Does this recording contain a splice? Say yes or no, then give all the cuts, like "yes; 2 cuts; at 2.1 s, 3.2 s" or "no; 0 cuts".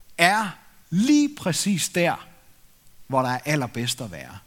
no; 0 cuts